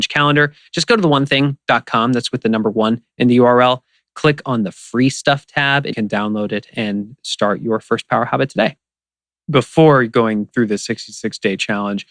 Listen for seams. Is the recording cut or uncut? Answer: cut